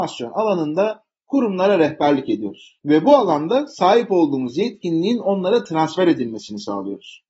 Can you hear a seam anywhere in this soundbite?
no; 0 cuts

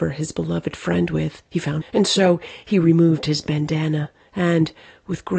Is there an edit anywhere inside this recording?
yes; 2 cuts; at 1.5 s, 1.8 s

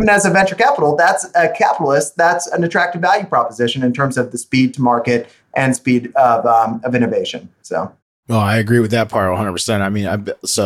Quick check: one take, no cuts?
yes; 0 cuts

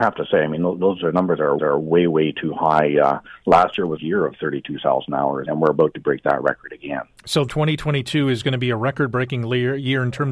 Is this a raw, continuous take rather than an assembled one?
no; 4 cuts; at 1.6 s, 4.0 s, 5.5 s, 7.5 s

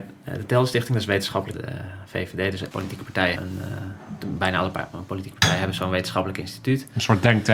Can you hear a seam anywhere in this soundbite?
yes; 3 cuts; at 1.5 s, 2.7 s, 3.4 s

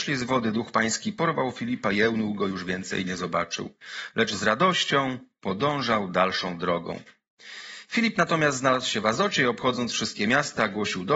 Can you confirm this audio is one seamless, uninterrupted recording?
yes; 0 cuts

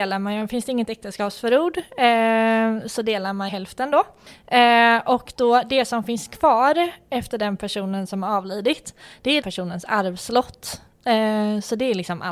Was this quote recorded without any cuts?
no; 2 cuts; at 3.5 s, 9.4 s

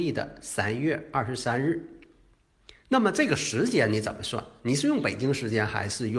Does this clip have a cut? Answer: no; 0 cuts

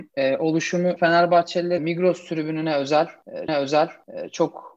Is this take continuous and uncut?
no; 3 cuts; at 1.0 s, 1.8 s, 3.5 s

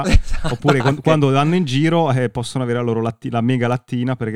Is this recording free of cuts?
yes; 0 cuts

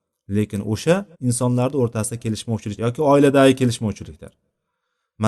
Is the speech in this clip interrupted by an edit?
yes; 2 cuts; at 1.1 s, 2.8 s

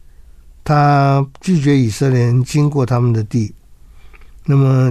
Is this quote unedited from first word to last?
yes; 0 cuts

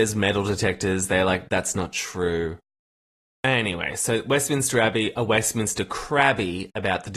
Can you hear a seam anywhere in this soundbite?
no; 0 cuts

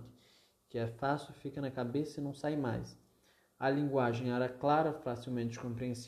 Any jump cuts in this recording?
no; 0 cuts

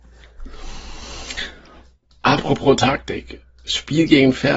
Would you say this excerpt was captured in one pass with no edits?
yes; 0 cuts

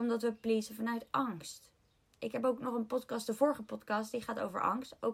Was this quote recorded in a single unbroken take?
yes; 0 cuts

